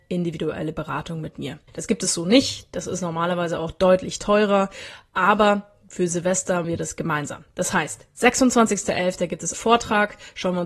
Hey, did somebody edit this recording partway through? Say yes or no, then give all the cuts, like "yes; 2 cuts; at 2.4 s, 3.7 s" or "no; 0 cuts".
yes; 3 cuts; at 1.7 s, 6.6 s, 9.5 s